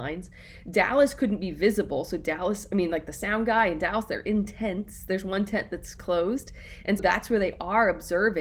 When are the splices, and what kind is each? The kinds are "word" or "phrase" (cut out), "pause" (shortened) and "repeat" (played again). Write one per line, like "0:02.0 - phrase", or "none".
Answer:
0:06.0 - word
0:07.0 - word